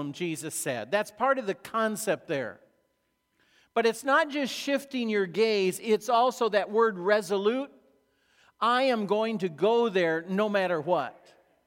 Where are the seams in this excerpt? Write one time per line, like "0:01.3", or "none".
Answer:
none